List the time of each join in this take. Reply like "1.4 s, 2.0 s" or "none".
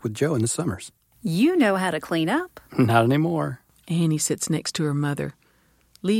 none